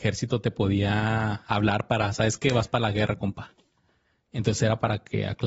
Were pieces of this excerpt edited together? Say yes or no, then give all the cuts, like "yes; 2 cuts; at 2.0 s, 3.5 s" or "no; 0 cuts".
no; 0 cuts